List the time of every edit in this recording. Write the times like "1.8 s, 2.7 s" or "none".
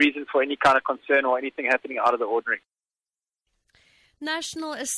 none

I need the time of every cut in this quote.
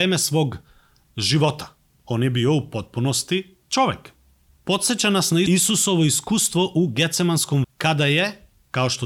7.6 s

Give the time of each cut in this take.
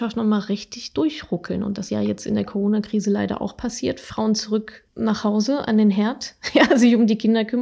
1.9 s, 4.9 s

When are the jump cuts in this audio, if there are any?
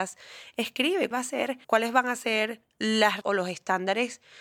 1.1 s, 1.6 s, 3.2 s

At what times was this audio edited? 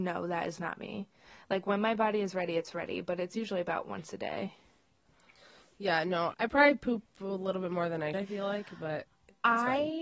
6.3 s, 8.1 s

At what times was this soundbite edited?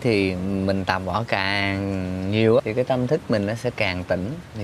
2.6 s

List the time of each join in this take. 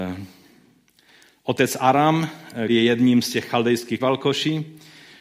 2.7 s, 4.0 s

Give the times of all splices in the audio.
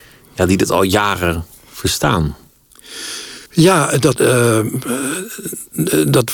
3.5 s, 4.2 s

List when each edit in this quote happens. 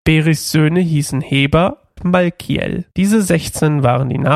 2.0 s, 2.9 s

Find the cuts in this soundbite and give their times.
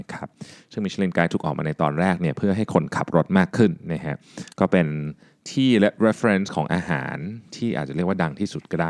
none

